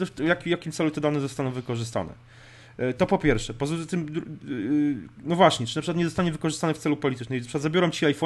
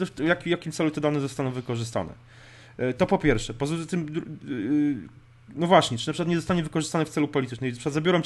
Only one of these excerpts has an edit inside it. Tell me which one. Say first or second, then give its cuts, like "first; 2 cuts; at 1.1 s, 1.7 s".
first; 1 cut; at 5.1 s